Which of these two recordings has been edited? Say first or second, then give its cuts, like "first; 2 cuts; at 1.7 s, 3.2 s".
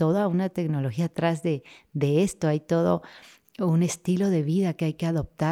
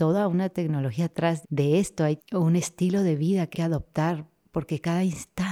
second; 3 cuts; at 1.4 s, 2.2 s, 3.5 s